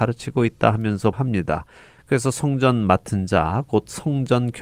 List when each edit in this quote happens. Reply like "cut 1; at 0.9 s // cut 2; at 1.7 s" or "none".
cut 1; at 1.1 s

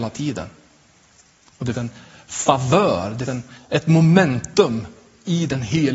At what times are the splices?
cut 1; at 1.7 s // cut 2; at 3.3 s

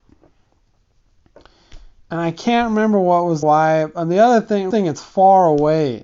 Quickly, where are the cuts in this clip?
cut 1; at 3.4 s // cut 2; at 4.7 s

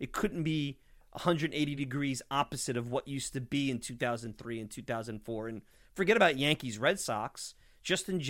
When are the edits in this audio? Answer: none

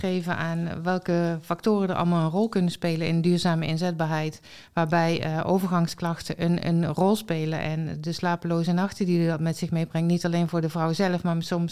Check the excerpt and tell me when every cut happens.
none

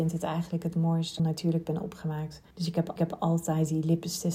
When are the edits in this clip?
cut 1; at 1.2 s // cut 2; at 2.5 s // cut 3; at 3.0 s

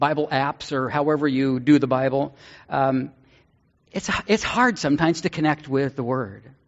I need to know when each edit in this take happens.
none

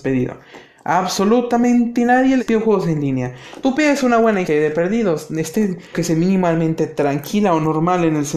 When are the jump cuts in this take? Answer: cut 1; at 2.4 s // cut 2; at 3.6 s // cut 3; at 4.4 s // cut 4; at 5.9 s

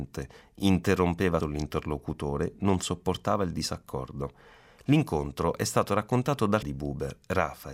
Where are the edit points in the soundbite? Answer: cut 1; at 1.4 s // cut 2; at 6.6 s

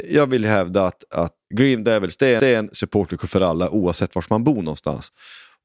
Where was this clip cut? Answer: cut 1; at 1.4 s // cut 2; at 2.4 s

